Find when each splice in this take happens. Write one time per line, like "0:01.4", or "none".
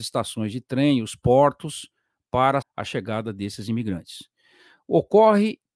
0:02.6